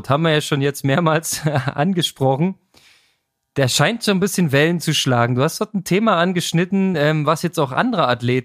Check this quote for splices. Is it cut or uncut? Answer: uncut